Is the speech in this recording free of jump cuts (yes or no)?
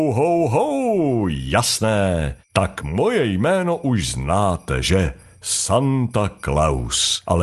yes